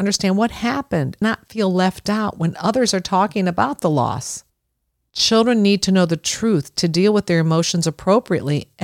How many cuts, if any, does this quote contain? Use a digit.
1